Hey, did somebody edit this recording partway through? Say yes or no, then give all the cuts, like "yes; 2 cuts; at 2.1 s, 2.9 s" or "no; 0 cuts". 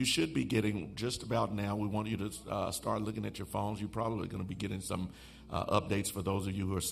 no; 0 cuts